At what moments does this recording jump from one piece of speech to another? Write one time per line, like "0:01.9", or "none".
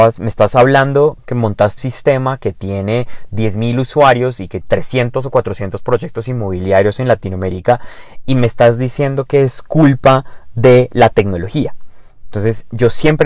0:01.8
0:04.6